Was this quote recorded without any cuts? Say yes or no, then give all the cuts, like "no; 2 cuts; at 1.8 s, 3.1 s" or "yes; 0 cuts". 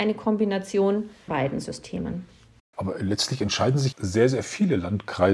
no; 2 cuts; at 1.3 s, 3.9 s